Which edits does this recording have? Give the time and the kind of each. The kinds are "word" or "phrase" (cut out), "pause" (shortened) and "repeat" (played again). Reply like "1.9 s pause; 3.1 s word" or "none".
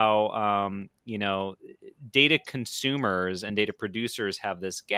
none

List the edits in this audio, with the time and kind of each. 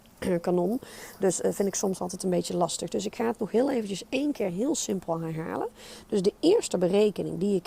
none

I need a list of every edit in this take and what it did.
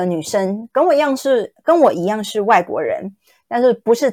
none

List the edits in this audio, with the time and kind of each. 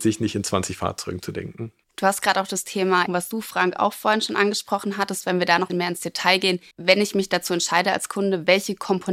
3.1 s phrase; 5.7 s phrase; 6.7 s pause

